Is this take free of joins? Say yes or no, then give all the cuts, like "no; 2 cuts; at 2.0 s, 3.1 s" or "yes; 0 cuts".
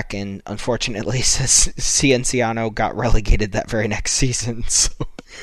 yes; 0 cuts